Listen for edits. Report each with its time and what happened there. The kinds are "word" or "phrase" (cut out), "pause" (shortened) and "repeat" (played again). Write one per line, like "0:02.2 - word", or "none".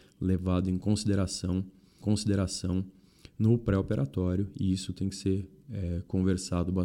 0:02.0 - repeat